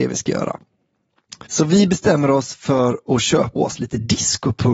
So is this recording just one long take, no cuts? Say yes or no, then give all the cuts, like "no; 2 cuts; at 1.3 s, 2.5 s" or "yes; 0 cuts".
no; 2 cuts; at 1.5 s, 3.6 s